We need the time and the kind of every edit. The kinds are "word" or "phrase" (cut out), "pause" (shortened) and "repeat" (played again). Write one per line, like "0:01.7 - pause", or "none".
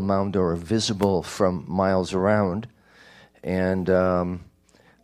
none